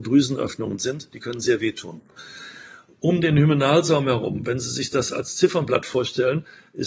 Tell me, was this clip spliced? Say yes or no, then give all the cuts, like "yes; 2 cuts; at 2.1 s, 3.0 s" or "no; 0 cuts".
no; 0 cuts